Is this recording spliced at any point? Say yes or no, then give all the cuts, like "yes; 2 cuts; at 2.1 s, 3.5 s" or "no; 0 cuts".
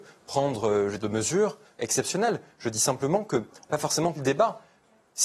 yes; 4 cuts; at 1.0 s, 1.8 s, 3.7 s, 4.1 s